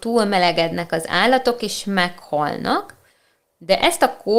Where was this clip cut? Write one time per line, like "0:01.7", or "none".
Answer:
none